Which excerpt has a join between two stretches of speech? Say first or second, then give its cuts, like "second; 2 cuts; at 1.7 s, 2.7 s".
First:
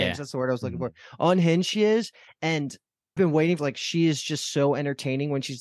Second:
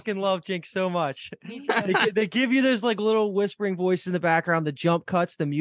first; 2 cuts; at 3.2 s, 3.6 s